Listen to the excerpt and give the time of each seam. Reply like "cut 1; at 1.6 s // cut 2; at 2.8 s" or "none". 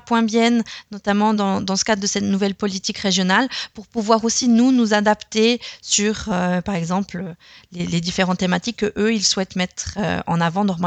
none